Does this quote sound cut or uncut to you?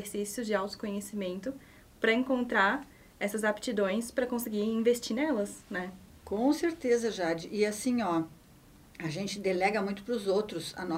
uncut